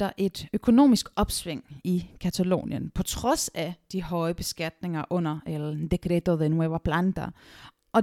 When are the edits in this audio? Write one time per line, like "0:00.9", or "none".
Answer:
none